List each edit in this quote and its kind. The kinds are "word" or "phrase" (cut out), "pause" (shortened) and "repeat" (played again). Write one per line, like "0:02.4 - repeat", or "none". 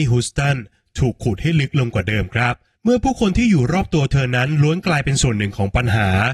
0:02.8 - pause